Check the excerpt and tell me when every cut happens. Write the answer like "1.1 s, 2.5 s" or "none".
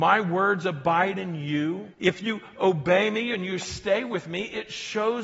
1.9 s